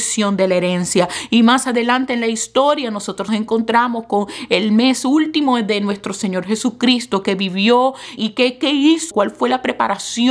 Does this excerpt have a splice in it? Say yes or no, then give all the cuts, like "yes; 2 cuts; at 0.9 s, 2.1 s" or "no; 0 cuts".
yes; 3 cuts; at 3.3 s, 8.2 s, 9.1 s